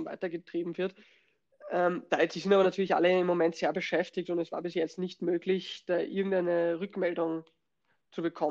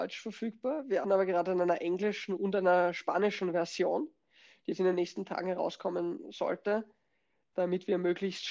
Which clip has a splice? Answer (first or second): second